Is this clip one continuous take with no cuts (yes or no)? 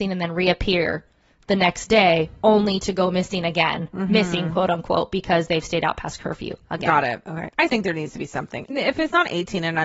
no